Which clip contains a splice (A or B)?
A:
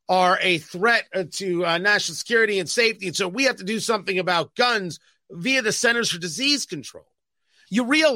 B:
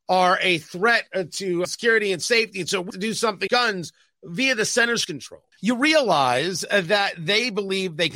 B